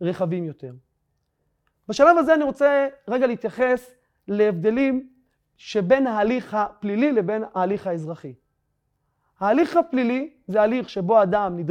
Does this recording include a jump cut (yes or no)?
no